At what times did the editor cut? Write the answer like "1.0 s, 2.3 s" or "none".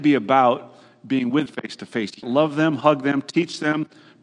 1.5 s, 2.2 s